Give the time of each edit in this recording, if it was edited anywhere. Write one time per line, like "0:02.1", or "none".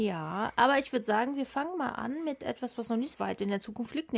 0:03.1